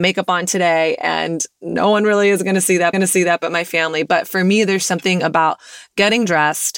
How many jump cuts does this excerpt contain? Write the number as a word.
one